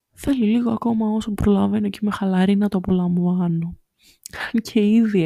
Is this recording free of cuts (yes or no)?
yes